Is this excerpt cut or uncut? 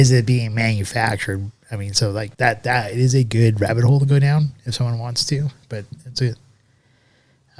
cut